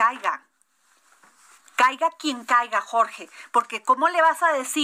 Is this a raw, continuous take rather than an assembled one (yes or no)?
yes